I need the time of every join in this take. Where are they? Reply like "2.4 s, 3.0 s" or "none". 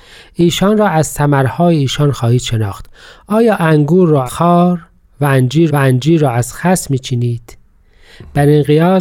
4.3 s, 5.7 s